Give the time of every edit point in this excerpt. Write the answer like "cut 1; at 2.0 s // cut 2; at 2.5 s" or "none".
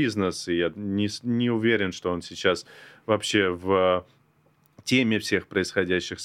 none